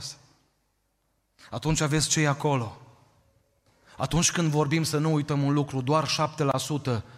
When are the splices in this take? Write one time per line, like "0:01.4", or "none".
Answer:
none